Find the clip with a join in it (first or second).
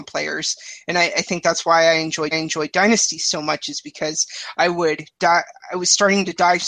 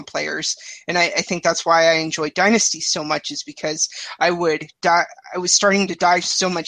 first